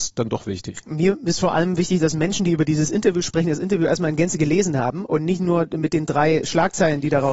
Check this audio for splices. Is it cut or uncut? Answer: uncut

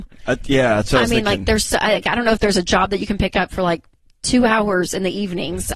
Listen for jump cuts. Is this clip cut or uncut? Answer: uncut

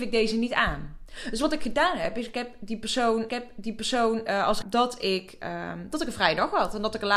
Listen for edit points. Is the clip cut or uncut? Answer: cut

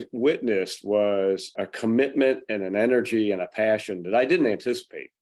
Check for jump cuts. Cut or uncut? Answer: cut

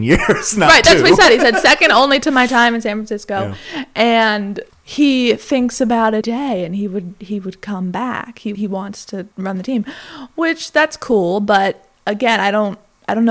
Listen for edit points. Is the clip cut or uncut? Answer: cut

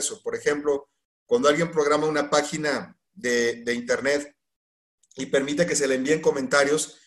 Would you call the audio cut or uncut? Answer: uncut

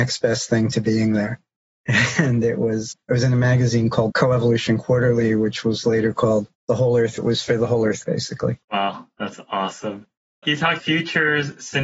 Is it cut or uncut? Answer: cut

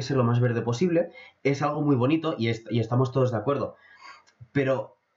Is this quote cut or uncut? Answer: uncut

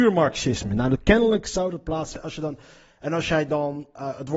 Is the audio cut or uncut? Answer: uncut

